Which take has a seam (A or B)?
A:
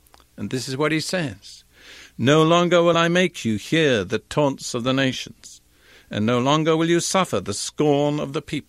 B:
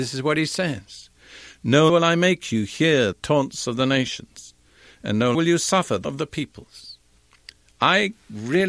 B